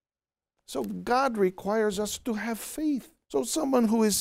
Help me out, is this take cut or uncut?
cut